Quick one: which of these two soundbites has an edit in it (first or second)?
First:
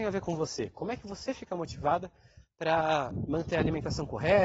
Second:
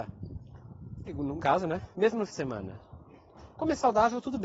second